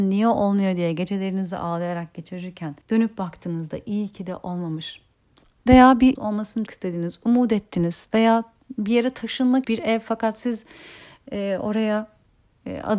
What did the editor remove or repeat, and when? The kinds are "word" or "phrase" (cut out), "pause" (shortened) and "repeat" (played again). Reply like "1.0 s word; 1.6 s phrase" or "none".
2.8 s pause; 6.2 s phrase; 6.7 s word; 9.6 s word